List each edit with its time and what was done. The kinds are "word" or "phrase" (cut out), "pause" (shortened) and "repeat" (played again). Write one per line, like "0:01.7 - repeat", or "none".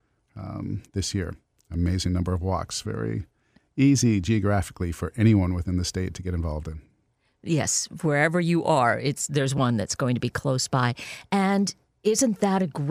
none